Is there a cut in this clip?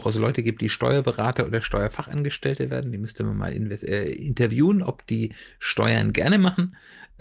no; 0 cuts

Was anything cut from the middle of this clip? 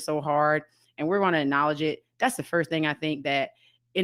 no; 0 cuts

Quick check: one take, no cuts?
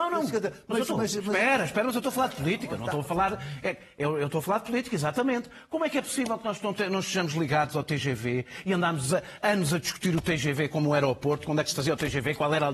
yes; 0 cuts

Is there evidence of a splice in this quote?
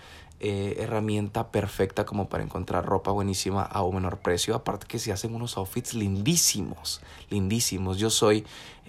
no; 0 cuts

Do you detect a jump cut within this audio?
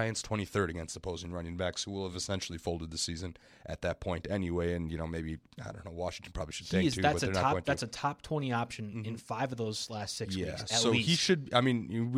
no; 0 cuts

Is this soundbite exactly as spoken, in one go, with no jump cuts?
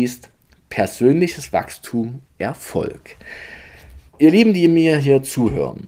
no; 2 cuts; at 2.3 s, 4.1 s

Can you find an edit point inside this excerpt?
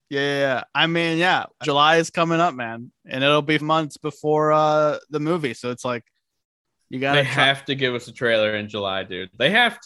yes; 2 cuts; at 1.6 s, 3.6 s

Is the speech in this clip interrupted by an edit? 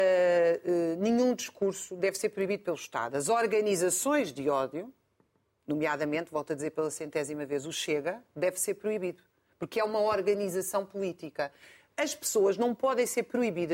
no; 0 cuts

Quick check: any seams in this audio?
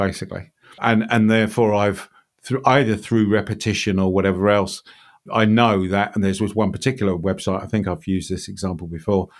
no; 0 cuts

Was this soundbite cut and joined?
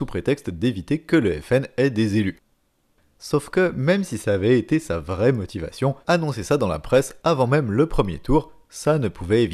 yes; 1 cut; at 6.0 s

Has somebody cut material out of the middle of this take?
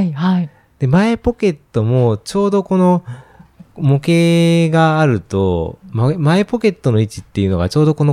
no; 0 cuts

